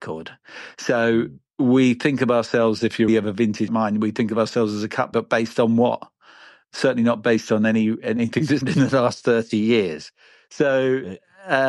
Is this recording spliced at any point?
yes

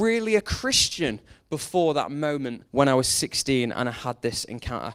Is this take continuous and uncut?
no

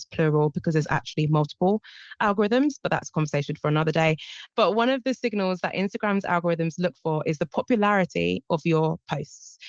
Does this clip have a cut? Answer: no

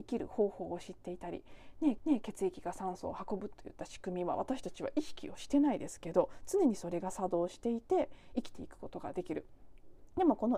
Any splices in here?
yes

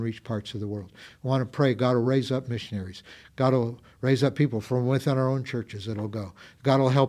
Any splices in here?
no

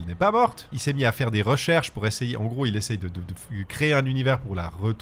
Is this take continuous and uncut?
yes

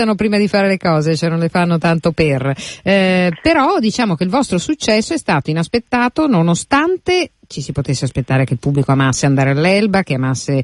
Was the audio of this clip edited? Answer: no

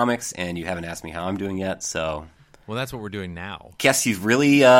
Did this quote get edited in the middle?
no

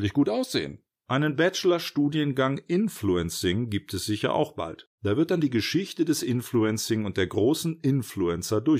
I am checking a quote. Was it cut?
yes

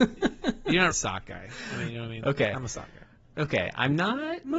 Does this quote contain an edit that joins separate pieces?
yes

